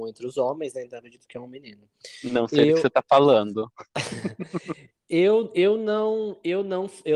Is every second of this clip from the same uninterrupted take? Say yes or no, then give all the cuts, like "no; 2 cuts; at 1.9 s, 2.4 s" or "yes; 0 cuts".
yes; 0 cuts